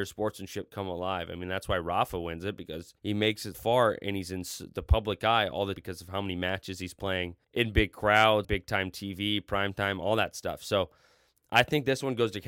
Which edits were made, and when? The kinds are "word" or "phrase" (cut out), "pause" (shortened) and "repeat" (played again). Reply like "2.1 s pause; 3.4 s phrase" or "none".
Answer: 3.0 s pause; 3.5 s word; 5.8 s word; 7.4 s pause; 8.4 s word